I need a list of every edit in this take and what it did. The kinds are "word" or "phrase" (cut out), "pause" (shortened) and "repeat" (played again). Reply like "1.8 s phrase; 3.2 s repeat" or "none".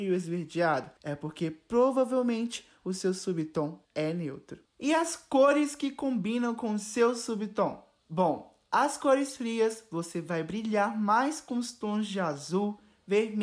3.8 s pause